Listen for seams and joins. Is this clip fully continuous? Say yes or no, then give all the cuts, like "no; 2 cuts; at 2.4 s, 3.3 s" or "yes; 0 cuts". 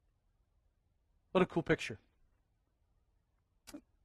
yes; 0 cuts